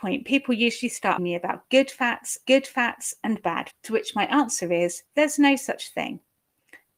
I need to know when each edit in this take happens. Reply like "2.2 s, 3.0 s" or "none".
1.2 s, 2.4 s, 3.7 s, 5.1 s